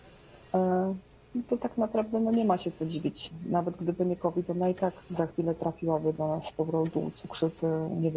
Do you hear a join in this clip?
yes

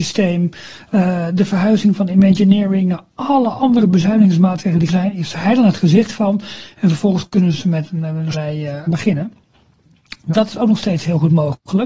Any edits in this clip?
yes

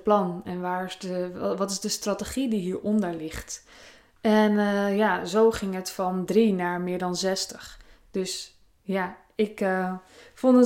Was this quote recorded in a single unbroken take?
yes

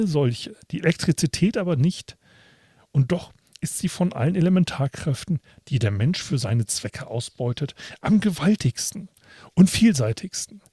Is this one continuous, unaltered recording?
yes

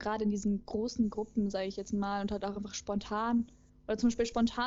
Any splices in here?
no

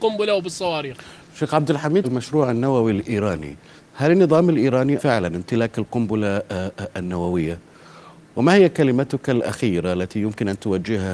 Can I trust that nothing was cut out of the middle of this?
no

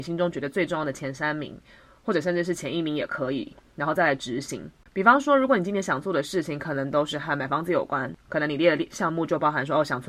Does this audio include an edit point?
no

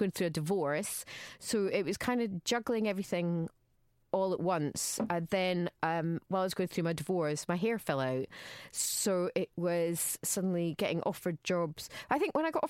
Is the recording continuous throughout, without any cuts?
yes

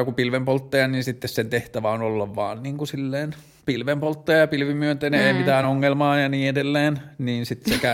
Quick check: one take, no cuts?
yes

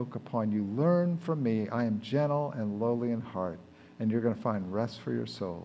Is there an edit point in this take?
no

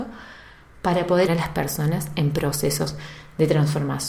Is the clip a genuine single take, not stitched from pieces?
no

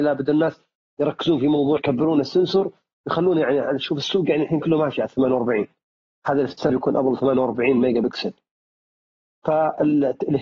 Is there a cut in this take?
yes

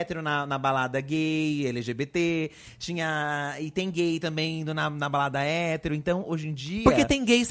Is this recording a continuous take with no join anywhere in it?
yes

